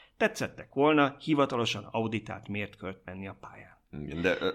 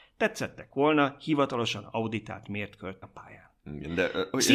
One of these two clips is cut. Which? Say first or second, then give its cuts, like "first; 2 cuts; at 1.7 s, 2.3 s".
second; 1 cut; at 3.0 s